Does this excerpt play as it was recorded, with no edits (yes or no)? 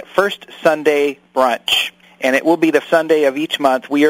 no